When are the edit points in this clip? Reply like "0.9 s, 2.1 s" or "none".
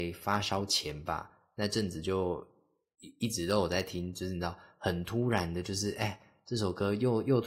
none